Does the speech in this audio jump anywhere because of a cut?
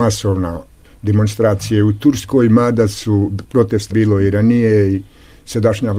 yes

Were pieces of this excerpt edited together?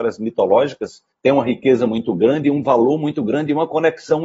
yes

